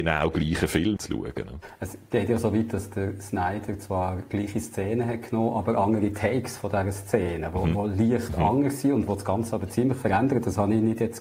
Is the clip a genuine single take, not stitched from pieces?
no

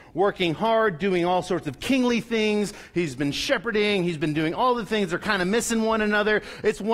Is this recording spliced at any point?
no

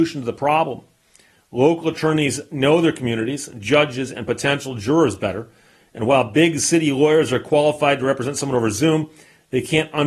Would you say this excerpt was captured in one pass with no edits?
yes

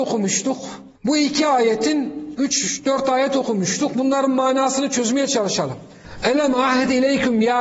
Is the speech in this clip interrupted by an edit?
yes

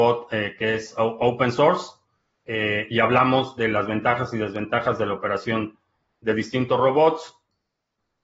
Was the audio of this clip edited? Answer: no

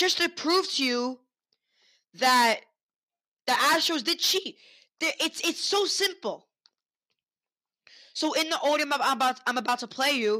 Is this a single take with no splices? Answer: yes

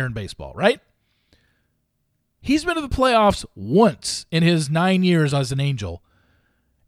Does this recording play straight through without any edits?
yes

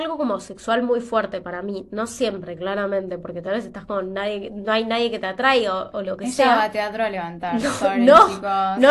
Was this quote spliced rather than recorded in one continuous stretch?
no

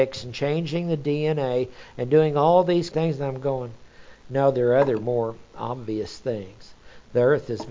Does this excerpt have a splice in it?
yes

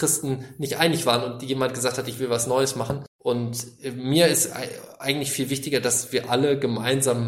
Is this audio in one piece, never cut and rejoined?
no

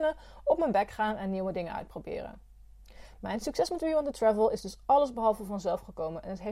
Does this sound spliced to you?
no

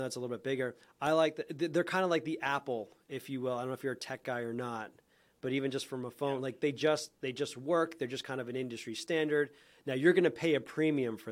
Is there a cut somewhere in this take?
no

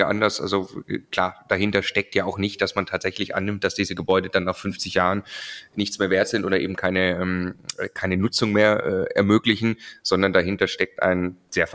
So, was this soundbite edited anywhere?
yes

